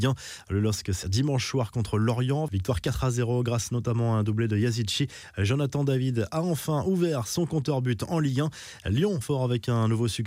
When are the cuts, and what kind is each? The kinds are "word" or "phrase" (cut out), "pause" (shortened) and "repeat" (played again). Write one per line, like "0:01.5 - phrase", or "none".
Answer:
0:01.0 - word
0:09.2 - word